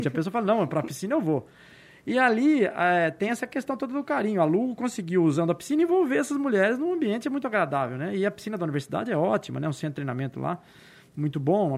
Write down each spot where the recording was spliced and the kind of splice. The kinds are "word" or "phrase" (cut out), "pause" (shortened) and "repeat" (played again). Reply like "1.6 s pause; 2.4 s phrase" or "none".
none